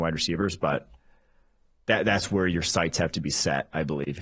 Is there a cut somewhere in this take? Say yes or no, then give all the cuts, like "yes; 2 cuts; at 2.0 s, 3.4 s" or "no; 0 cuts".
no; 0 cuts